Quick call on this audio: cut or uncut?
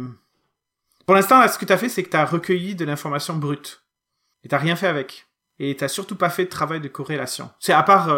uncut